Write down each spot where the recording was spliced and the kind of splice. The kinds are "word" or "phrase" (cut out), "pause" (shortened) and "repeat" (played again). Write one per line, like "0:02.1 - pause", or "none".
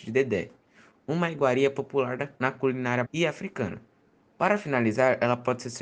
0:03.0 - word